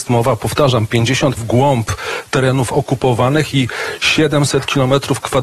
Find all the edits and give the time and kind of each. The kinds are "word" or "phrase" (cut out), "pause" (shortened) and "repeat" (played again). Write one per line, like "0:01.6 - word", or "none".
0:01.4 - word